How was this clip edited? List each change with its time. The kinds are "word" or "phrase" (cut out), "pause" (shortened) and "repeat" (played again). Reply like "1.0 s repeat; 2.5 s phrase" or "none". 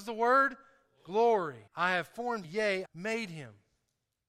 1.7 s pause; 2.4 s word; 2.9 s phrase